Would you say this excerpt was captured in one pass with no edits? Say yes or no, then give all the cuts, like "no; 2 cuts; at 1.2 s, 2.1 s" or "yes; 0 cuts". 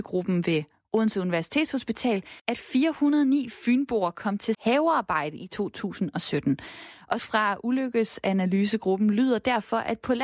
no; 3 cuts; at 2.4 s, 4.5 s, 7.2 s